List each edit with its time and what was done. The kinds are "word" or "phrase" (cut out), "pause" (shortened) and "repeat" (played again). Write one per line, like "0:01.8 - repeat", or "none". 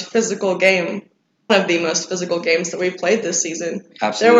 0:01.5 - word